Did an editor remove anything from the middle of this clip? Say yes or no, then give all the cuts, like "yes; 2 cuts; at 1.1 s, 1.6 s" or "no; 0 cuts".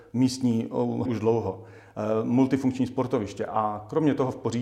yes; 1 cut; at 1.1 s